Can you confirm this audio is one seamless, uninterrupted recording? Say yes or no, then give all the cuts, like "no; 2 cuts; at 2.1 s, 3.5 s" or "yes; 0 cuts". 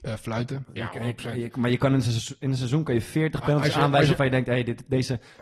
yes; 0 cuts